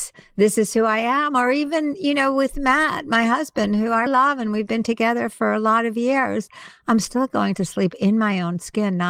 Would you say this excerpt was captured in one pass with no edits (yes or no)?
no